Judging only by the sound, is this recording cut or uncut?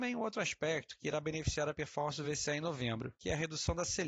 uncut